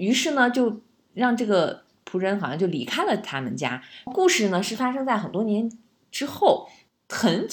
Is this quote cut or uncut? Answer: uncut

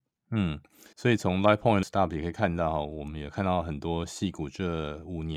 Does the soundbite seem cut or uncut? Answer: cut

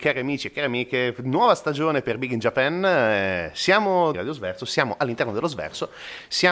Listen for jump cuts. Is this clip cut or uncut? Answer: cut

